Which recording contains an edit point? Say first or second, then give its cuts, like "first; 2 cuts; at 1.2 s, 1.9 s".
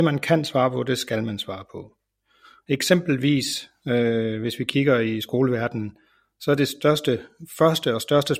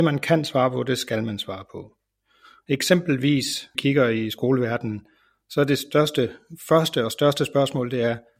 second; 1 cut; at 3.7 s